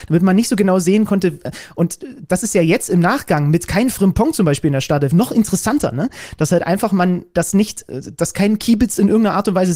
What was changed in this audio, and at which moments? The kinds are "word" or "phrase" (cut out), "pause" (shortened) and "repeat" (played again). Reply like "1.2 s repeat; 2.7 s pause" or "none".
none